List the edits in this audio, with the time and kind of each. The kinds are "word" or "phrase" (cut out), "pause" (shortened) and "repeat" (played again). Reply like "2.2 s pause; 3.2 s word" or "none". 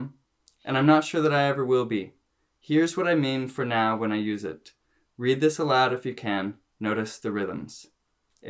none